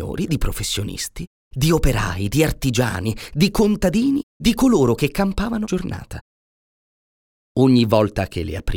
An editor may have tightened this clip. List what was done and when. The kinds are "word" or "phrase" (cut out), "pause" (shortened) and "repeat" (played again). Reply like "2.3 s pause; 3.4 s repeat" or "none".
4.4 s word; 5.6 s word